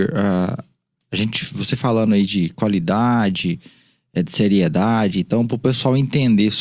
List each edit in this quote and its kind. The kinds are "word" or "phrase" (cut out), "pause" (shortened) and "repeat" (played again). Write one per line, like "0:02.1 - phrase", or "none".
0:01.8 - word